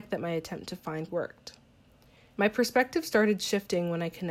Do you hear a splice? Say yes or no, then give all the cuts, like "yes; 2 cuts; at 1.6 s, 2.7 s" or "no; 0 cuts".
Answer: yes; 1 cut; at 1.1 s